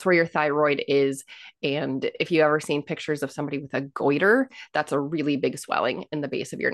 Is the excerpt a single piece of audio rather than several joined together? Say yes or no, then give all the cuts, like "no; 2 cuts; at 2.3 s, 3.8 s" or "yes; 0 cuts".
yes; 0 cuts